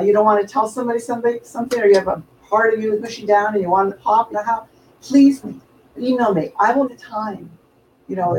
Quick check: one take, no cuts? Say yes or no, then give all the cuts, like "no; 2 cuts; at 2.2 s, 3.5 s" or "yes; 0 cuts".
no; 6 cuts; at 3.0 s, 3.9 s, 4.3 s, 5.4 s, 6.0 s, 6.9 s